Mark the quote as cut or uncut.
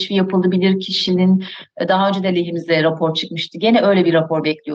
uncut